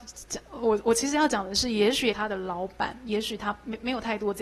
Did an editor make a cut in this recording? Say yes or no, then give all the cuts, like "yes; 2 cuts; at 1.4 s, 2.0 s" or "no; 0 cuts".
yes; 1 cut; at 2.1 s